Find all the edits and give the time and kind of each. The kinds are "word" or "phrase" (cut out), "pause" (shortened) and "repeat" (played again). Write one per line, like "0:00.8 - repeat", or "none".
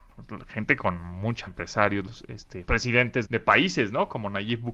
0:01.5 - word
0:02.7 - word
0:03.2 - word